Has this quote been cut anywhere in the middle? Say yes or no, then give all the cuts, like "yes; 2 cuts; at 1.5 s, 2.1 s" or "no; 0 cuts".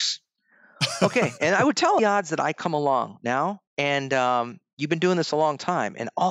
yes; 2 cuts; at 2.0 s, 3.7 s